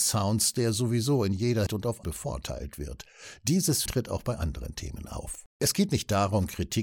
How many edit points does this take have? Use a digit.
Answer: 4